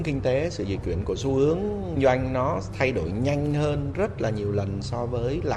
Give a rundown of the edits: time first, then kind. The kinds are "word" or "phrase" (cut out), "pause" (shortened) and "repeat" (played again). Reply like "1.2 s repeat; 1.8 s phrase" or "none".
2.0 s word